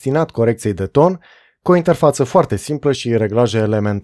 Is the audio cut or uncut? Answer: uncut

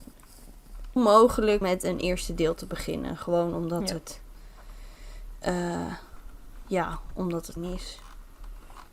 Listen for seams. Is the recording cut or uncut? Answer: cut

